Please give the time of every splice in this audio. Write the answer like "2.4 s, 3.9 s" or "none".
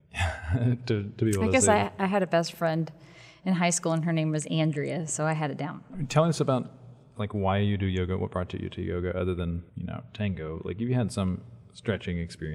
none